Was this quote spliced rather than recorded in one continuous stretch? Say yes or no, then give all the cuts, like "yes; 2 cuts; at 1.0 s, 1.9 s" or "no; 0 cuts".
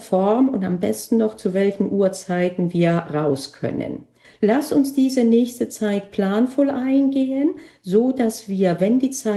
yes; 1 cut; at 4.2 s